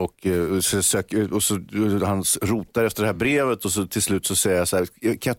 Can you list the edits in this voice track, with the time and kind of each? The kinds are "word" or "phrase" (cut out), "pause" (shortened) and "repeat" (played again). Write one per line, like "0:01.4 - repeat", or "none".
none